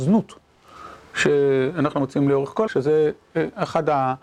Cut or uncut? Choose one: cut